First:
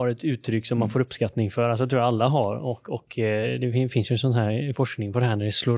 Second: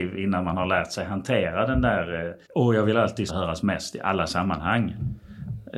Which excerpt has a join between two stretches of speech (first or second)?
second